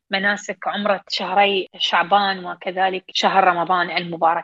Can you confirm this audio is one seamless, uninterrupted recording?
yes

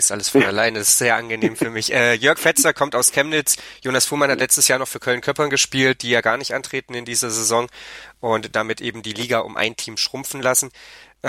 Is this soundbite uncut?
yes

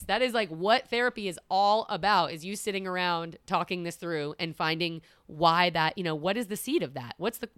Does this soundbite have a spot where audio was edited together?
no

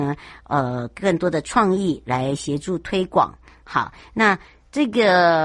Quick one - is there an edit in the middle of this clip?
no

